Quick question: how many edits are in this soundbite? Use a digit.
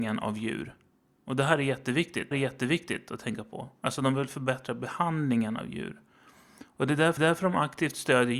2